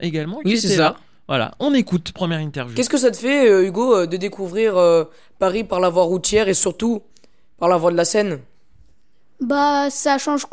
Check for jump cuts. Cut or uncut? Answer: uncut